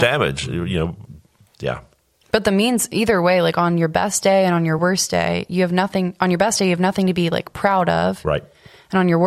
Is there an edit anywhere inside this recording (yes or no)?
no